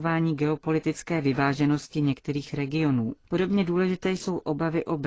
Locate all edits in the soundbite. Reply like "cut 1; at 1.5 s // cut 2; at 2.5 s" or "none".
cut 1; at 3.2 s